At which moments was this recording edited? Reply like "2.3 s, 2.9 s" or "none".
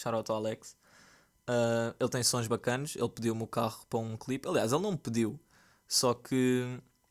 none